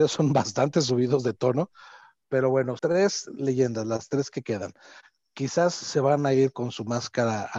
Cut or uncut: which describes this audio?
cut